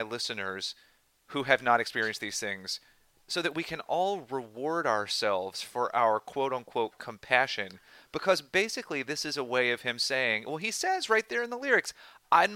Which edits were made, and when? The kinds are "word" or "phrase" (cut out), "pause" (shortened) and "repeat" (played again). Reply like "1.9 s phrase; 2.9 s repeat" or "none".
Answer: none